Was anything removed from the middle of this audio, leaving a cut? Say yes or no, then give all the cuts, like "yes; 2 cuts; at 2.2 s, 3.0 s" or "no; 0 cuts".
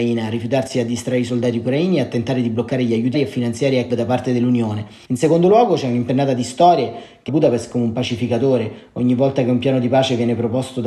yes; 3 cuts; at 3.1 s, 3.9 s, 7.3 s